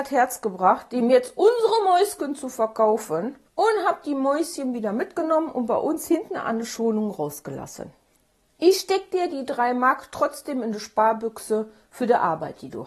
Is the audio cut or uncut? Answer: cut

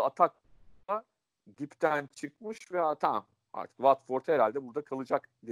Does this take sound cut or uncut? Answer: uncut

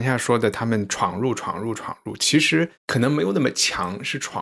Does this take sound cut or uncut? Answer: cut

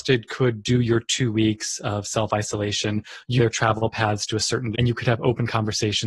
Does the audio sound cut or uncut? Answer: cut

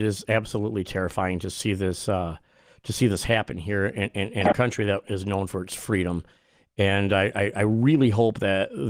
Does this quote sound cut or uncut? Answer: uncut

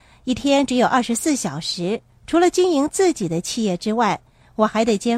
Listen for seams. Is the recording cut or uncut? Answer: uncut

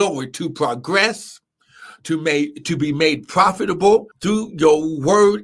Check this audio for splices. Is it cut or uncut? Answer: cut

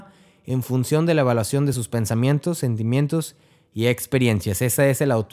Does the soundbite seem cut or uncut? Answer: uncut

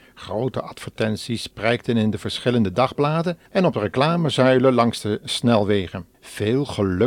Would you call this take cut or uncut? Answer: cut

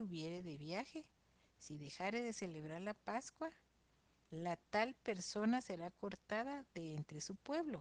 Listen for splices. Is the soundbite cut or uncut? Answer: uncut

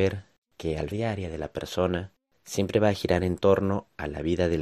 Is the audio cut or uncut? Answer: cut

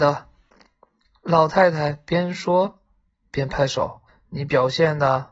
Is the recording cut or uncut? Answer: cut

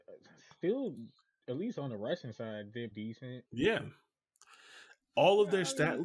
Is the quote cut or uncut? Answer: cut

